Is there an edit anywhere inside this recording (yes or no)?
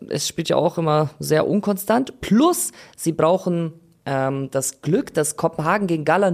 no